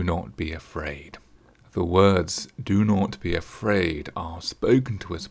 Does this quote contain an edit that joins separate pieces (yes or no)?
yes